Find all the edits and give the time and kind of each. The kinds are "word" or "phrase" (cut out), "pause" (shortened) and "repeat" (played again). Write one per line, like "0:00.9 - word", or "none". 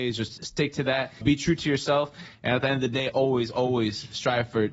0:01.2 - word
0:03.1 - word